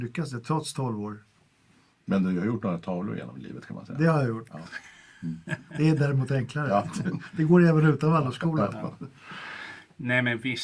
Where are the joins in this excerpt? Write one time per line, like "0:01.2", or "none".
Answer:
none

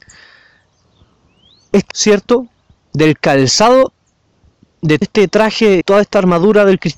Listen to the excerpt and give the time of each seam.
0:01.9
0:05.0
0:05.8

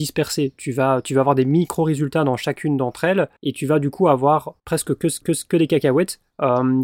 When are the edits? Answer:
0:03.4
0:04.6
0:05.2

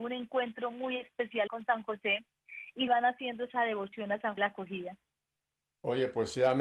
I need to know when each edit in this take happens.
0:01.5
0:02.9
0:04.4

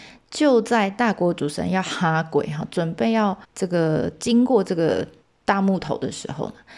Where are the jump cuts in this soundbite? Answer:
0:03.4
0:05.2

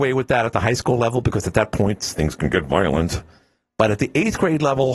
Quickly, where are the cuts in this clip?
none

